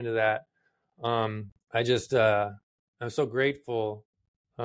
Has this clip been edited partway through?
yes; 1 cut; at 1.6 s

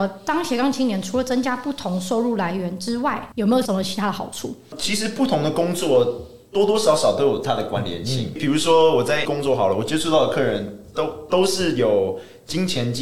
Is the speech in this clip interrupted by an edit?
yes; 1 cut; at 9.2 s

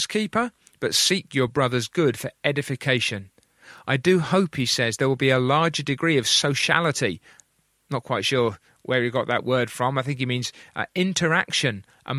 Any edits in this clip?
no; 0 cuts

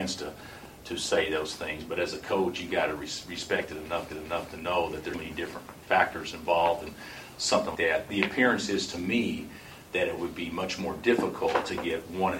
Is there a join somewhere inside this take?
yes; 3 cuts; at 4.1 s, 5.1 s, 7.7 s

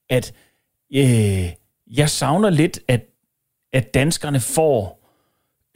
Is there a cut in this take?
yes; 1 cut; at 2.8 s

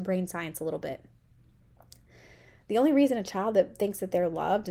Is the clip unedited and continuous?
yes; 0 cuts

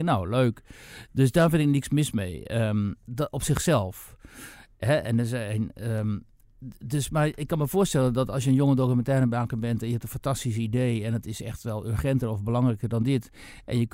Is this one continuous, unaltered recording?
no; 1 cut; at 3.1 s

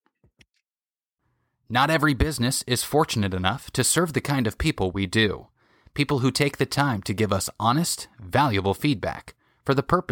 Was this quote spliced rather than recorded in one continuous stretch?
no; 0 cuts

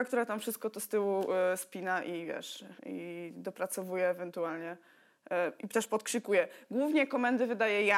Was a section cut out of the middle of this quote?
yes; 1 cut; at 2.8 s

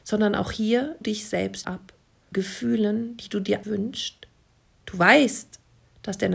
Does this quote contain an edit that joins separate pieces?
yes; 4 cuts; at 1.0 s, 1.6 s, 2.3 s, 3.6 s

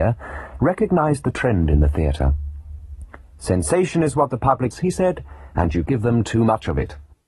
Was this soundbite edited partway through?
yes; 2 cuts; at 4.7 s, 5.9 s

